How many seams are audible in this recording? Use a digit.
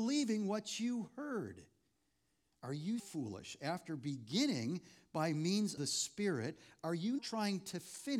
3